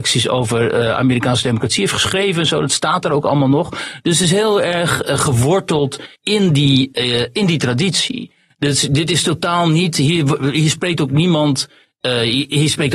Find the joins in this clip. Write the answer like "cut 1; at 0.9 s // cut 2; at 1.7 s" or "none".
cut 1; at 6.1 s